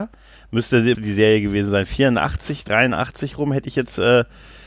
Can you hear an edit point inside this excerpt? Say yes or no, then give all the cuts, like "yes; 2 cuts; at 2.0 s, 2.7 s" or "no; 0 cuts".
yes; 1 cut; at 0.9 s